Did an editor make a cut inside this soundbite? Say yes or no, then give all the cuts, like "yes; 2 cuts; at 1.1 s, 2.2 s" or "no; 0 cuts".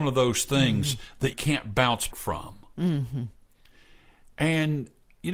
yes; 2 cuts; at 1.3 s, 2.1 s